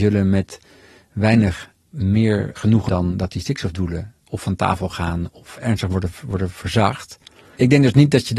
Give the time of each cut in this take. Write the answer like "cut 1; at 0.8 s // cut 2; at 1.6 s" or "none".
cut 1; at 2.9 s // cut 2; at 4.2 s